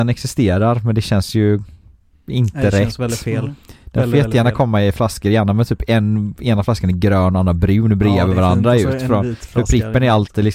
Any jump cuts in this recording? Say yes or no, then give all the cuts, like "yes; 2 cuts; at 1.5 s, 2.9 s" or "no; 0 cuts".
no; 0 cuts